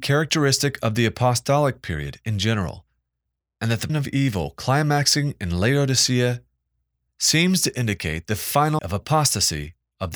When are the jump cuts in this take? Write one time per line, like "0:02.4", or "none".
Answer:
0:03.9
0:08.8